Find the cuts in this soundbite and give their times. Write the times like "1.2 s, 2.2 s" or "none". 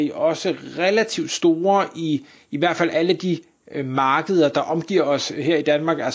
none